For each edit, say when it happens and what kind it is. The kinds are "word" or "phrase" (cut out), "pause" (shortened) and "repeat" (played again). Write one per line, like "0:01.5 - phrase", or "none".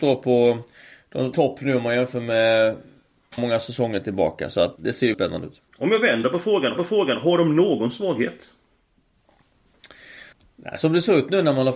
0:01.3 - phrase
0:03.4 - word
0:04.8 - word
0:05.1 - word
0:05.7 - pause
0:06.7 - repeat
0:10.3 - pause